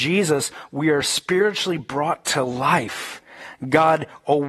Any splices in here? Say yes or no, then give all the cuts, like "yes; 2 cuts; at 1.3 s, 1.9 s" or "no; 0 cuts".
no; 0 cuts